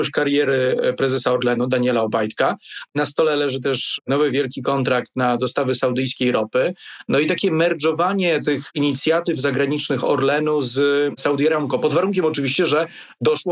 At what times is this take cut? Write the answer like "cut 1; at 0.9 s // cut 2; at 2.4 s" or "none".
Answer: none